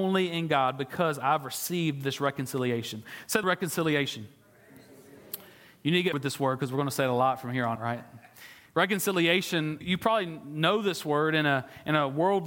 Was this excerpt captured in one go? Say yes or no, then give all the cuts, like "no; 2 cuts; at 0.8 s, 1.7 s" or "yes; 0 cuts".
no; 4 cuts; at 3.4 s, 6.1 s, 7.8 s, 9.8 s